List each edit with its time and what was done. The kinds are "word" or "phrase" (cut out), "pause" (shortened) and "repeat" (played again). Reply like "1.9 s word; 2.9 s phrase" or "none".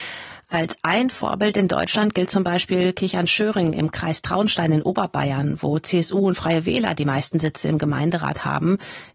none